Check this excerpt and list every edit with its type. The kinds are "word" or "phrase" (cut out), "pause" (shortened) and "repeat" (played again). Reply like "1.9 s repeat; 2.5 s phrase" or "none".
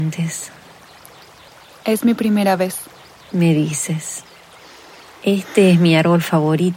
none